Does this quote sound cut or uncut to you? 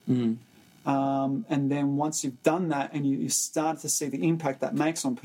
uncut